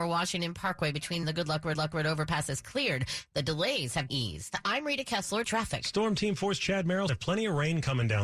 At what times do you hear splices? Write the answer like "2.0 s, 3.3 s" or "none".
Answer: 1.2 s, 1.7 s, 4.1 s, 5.4 s, 7.1 s